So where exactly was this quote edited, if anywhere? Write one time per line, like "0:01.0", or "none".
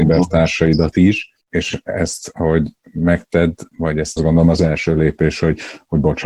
0:01.4
0:04.2